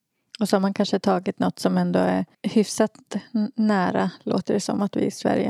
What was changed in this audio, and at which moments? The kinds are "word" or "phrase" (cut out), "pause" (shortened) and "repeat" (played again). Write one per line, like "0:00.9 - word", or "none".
0:02.3 - pause